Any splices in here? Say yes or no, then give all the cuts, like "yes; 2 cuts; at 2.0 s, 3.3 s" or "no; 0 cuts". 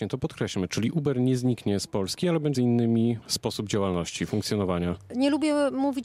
yes; 2 cuts; at 2.5 s, 3.2 s